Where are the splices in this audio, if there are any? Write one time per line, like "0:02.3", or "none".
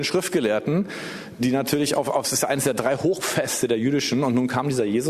0:01.4